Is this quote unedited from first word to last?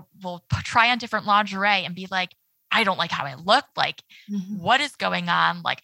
yes; 0 cuts

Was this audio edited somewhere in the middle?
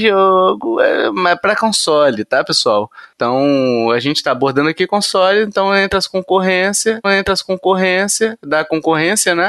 yes; 1 cut; at 7.0 s

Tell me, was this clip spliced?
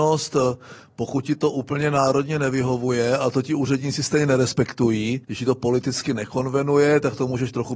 yes; 1 cut; at 5.2 s

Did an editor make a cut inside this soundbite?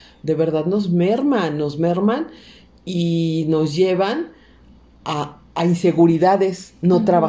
no; 0 cuts

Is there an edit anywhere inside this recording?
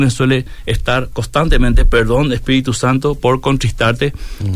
no; 0 cuts

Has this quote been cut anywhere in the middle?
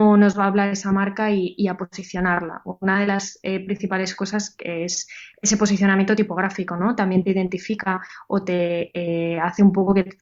no; 0 cuts

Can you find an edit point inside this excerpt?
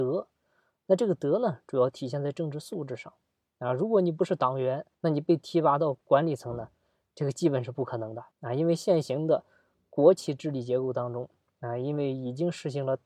yes; 2 cuts; at 4.9 s, 8.3 s

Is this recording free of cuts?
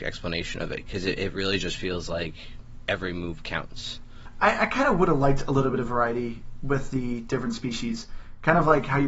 yes; 0 cuts

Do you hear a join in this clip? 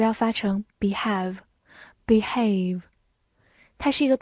no; 0 cuts

